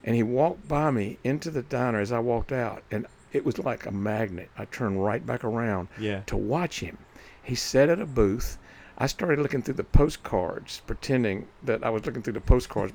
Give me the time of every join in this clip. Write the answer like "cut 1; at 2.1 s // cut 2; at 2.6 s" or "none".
none